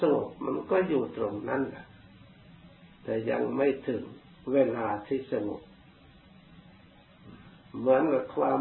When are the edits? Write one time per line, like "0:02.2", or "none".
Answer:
none